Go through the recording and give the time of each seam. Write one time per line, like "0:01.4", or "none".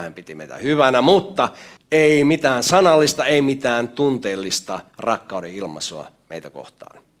0:01.8
0:04.9